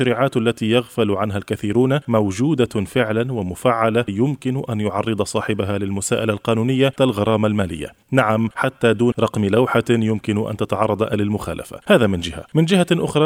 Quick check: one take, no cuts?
no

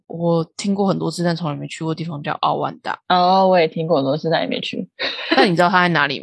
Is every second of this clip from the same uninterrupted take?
yes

